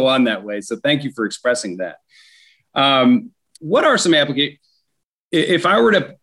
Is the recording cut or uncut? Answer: cut